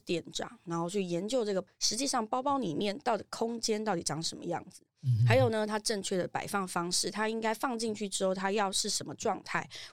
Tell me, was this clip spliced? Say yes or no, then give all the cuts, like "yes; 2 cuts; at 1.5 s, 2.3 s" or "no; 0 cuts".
no; 0 cuts